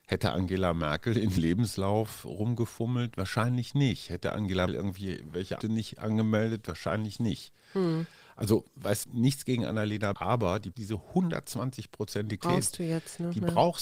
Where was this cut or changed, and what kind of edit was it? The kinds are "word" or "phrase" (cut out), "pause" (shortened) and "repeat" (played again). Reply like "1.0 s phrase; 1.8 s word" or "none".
1.4 s word; 4.7 s word; 5.6 s word; 9.0 s word; 10.1 s word; 10.7 s word; 12.4 s word